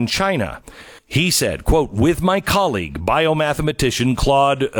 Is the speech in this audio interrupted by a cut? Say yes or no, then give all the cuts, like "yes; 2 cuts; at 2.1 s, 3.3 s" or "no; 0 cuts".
yes; 1 cut; at 1.0 s